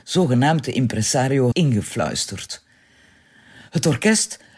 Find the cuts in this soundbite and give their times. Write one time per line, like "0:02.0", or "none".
0:01.5